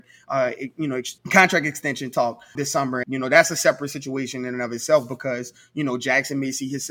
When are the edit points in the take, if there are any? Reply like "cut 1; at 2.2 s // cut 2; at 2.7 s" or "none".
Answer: cut 1; at 1.2 s // cut 2; at 2.6 s // cut 3; at 3.0 s